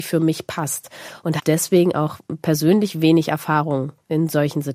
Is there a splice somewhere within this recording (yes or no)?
yes